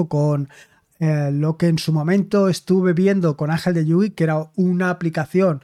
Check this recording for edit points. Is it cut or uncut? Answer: uncut